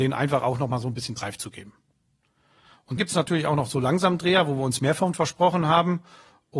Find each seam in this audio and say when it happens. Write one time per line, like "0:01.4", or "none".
0:03.0